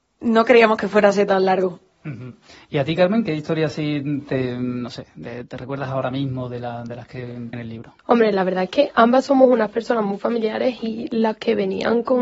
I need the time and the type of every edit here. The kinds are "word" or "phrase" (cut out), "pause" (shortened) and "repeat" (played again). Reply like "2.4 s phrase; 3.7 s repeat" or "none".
7.5 s word; 8.0 s pause